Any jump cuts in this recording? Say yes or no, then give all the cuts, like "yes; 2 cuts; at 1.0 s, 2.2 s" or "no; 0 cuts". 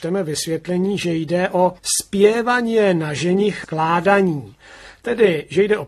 yes; 2 cuts; at 1.8 s, 3.6 s